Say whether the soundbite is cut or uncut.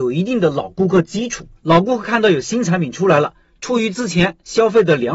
cut